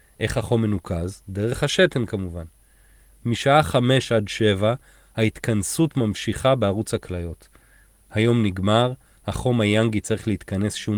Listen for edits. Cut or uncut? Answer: uncut